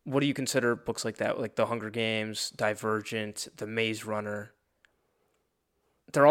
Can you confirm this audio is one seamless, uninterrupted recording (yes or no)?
yes